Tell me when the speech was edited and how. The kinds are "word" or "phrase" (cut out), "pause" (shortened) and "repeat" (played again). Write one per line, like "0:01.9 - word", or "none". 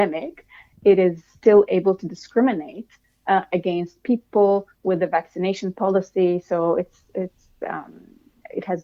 none